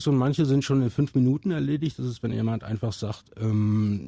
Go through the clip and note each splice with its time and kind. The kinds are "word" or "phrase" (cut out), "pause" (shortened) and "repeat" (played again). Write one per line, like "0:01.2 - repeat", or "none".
none